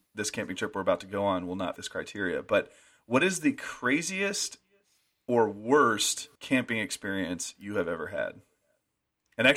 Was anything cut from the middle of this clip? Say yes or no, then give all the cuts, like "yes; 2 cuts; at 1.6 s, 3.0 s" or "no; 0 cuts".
yes; 2 cuts; at 1.8 s, 6.3 s